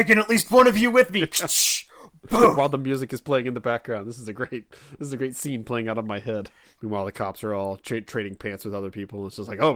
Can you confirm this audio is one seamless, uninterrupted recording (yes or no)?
yes